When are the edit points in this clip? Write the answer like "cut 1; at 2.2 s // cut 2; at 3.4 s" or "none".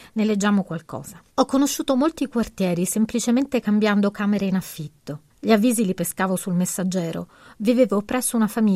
cut 1; at 1.3 s // cut 2; at 5.3 s